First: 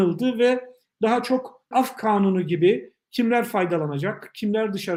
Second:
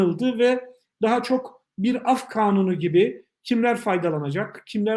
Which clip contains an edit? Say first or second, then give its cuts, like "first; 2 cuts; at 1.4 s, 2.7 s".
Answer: first; 1 cut; at 1.7 s